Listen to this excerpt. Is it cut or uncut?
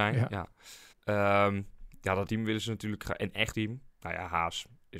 cut